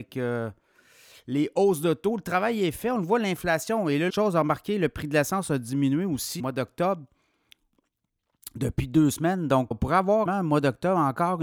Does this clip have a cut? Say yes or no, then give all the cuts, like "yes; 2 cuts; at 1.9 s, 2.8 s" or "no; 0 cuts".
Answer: yes; 4 cuts; at 4.1 s, 6.4 s, 9.7 s, 10.3 s